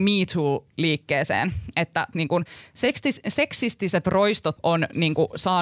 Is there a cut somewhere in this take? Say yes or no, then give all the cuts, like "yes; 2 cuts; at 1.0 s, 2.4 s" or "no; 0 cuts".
yes; 2 cuts; at 2.1 s, 4.6 s